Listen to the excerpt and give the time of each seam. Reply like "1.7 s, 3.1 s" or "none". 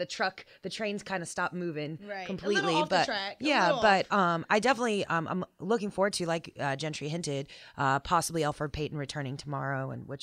none